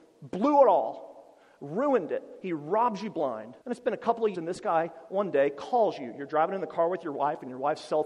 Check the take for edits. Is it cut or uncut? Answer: cut